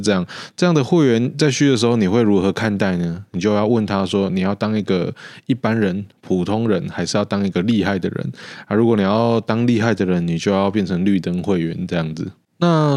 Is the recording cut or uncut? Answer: uncut